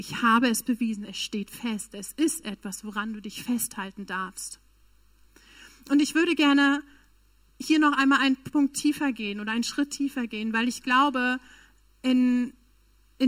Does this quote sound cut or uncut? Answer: uncut